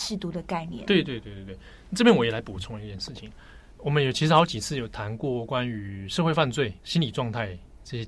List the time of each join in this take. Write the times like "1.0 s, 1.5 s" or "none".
6.8 s

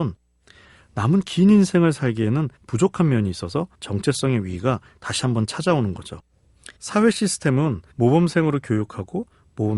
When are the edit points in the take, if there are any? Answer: 2.6 s, 3.7 s, 6.8 s, 7.9 s

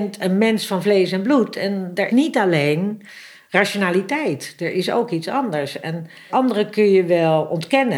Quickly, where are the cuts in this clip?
2.1 s, 6.3 s

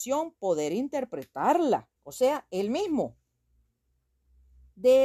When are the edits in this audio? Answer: 2.0 s

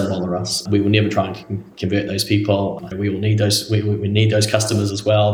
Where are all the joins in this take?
2.9 s

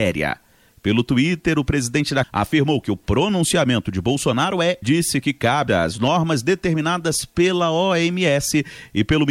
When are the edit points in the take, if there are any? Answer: 2.2 s, 4.8 s, 5.7 s

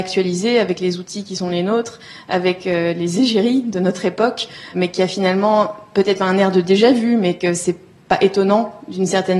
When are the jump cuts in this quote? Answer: none

